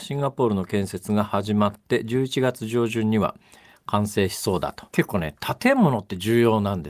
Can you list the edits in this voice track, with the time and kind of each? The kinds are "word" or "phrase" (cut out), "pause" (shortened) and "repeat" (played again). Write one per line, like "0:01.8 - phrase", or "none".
0:04.9 - pause